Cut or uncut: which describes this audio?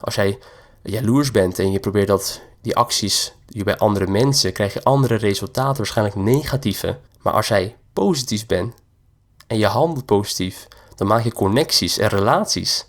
cut